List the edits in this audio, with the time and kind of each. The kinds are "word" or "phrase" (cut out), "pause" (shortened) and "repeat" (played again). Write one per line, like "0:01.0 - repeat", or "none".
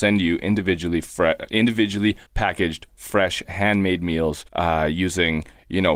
0:02.3 - pause
0:04.5 - pause